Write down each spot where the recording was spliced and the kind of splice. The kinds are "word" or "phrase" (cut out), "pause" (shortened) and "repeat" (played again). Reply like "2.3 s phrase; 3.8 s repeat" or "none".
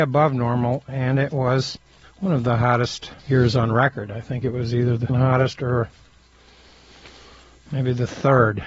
2.0 s pause; 3.2 s pause; 5.1 s word